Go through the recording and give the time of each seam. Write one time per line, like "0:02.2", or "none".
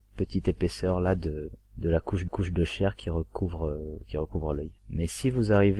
0:01.7
0:02.3
0:04.8